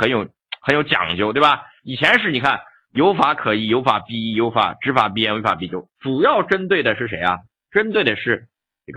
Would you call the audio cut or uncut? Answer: uncut